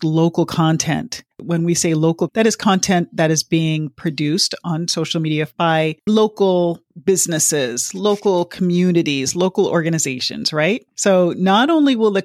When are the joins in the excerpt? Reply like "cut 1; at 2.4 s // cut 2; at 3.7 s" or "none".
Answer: cut 1; at 1.3 s // cut 2; at 2.3 s // cut 3; at 6.1 s